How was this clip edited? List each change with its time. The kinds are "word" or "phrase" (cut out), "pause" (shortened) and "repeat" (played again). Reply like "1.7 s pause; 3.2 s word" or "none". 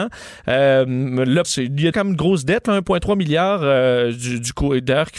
1.4 s word; 1.9 s word